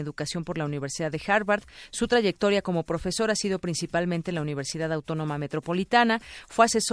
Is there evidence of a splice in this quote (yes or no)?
no